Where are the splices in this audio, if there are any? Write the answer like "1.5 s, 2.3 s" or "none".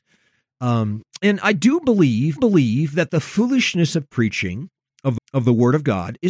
2.4 s, 5.2 s